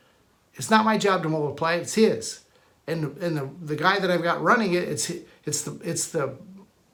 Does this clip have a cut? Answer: no; 0 cuts

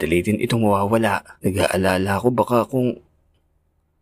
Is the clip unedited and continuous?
no; 1 cut; at 1.4 s

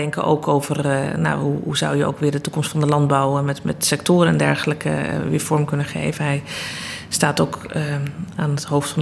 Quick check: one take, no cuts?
yes; 0 cuts

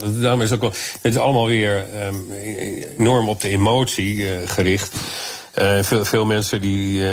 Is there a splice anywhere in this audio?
no; 0 cuts

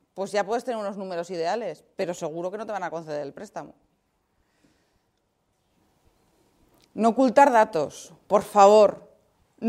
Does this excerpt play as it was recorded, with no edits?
yes; 0 cuts

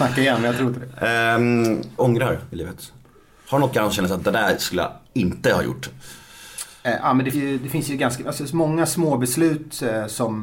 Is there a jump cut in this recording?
yes; 3 cuts; at 2.0 s, 3.7 s, 7.3 s

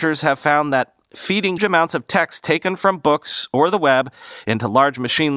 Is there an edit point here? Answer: yes; 1 cut; at 1.6 s

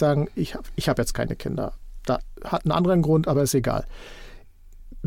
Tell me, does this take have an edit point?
no; 0 cuts

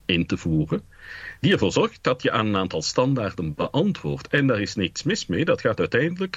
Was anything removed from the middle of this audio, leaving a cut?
no; 0 cuts

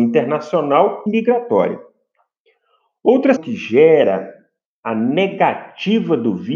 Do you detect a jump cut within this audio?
yes; 2 cuts; at 1.1 s, 3.4 s

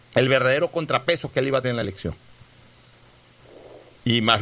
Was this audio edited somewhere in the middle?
yes; 1 cut; at 1.6 s

